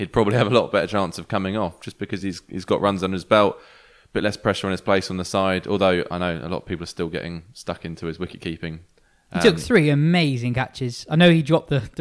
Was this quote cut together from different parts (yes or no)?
no